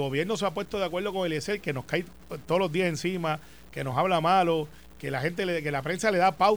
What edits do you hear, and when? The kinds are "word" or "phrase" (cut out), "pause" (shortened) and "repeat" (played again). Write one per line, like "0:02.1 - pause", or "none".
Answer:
none